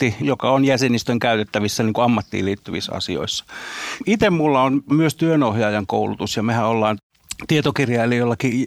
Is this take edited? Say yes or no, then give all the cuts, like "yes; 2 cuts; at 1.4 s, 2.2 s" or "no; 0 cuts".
no; 0 cuts